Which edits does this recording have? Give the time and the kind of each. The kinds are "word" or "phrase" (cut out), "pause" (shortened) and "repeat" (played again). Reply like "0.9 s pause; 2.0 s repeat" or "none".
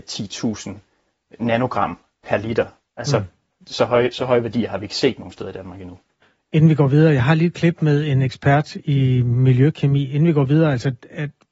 6.2 s pause